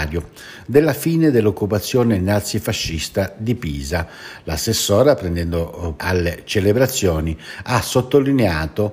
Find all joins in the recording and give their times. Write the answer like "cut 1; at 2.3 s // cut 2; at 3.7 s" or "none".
cut 1; at 6.0 s